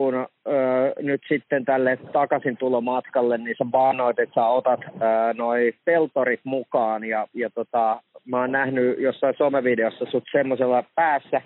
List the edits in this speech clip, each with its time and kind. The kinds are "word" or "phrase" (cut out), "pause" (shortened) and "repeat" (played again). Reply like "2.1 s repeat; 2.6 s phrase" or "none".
none